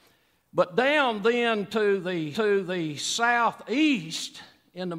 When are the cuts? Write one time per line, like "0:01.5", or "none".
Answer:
0:02.3